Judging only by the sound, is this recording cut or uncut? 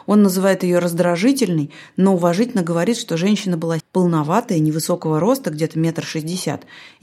cut